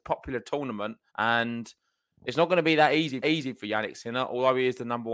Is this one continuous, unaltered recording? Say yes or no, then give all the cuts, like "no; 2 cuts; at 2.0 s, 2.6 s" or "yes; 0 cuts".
no; 2 cuts; at 1.1 s, 3.2 s